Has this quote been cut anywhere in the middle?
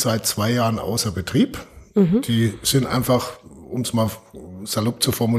no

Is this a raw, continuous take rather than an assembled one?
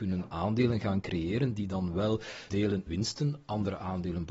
no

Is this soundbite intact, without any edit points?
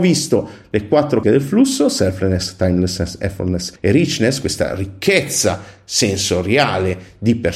no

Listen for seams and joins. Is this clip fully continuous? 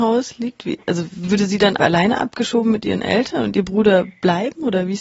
yes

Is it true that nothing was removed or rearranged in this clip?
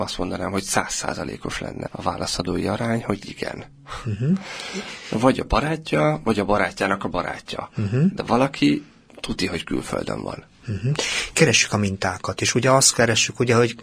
no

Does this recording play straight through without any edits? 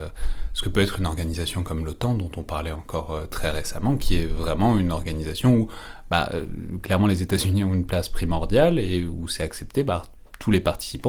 yes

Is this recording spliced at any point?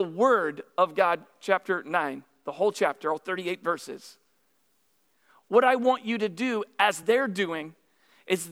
no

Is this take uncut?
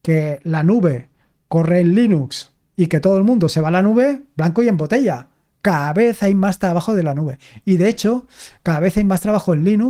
yes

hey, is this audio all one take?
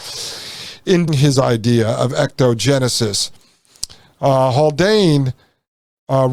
no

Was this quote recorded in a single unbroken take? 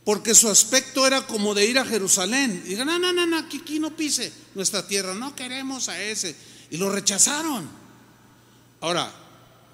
yes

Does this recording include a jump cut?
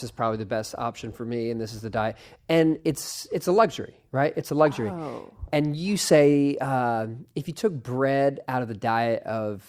no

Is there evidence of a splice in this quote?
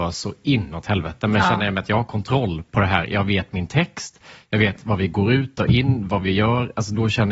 no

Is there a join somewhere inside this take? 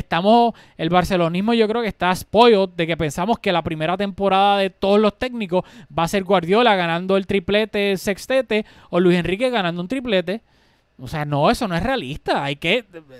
no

